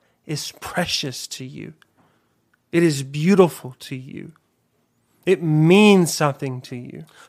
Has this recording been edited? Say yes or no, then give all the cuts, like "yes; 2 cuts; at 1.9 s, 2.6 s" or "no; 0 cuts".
no; 0 cuts